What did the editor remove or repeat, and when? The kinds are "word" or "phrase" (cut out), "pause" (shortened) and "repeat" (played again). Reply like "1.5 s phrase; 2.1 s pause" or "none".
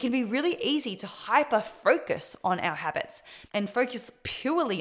3.5 s pause